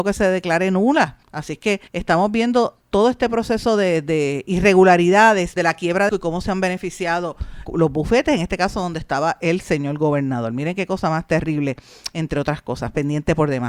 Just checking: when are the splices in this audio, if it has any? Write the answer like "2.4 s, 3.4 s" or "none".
1.2 s, 1.9 s, 2.8 s, 5.6 s, 6.1 s, 7.7 s

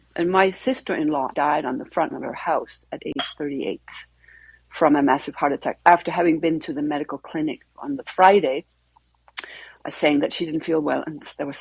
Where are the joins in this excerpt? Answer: 1.3 s, 2.1 s

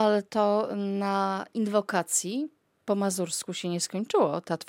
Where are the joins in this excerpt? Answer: none

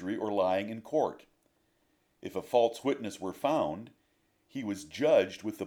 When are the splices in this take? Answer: none

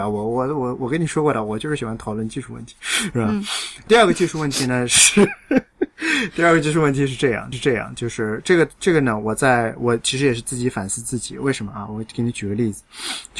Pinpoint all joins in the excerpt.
3.9 s, 7.5 s

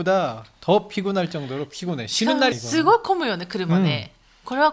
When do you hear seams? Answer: 2.5 s

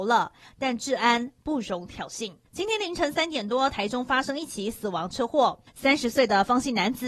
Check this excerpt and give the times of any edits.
2.5 s, 5.7 s

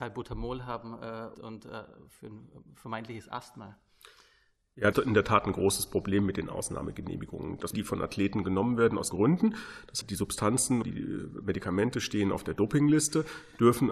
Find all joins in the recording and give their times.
1.3 s, 4.9 s, 7.7 s, 9.1 s, 10.0 s, 10.8 s

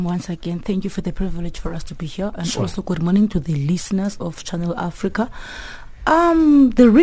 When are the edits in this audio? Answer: none

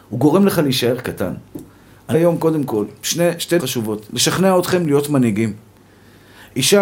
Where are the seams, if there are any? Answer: 2.1 s, 3.6 s

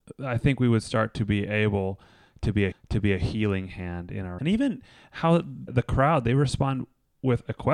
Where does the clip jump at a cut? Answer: 2.7 s, 4.4 s, 5.7 s

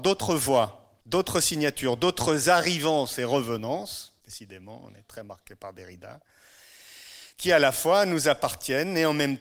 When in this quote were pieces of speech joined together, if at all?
1.0 s, 4.2 s

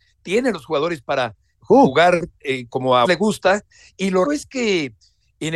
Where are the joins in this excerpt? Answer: 1.5 s, 2.7 s, 3.0 s, 4.2 s

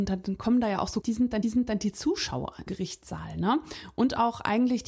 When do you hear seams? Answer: 1.0 s, 1.4 s, 2.7 s

